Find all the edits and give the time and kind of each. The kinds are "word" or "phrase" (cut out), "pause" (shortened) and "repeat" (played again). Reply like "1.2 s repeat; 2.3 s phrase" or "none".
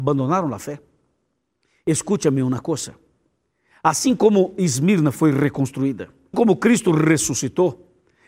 6.3 s word